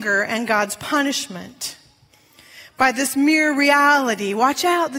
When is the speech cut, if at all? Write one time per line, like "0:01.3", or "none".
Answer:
none